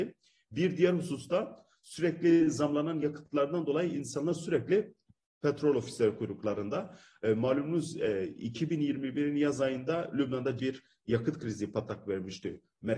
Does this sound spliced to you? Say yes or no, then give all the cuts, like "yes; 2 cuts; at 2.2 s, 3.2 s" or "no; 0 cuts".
yes; 1 cut; at 10.6 s